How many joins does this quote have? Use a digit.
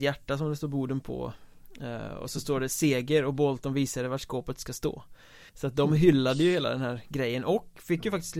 1